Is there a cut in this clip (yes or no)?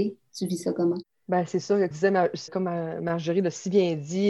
yes